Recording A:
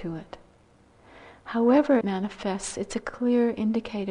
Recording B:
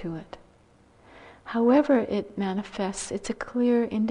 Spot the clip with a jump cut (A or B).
A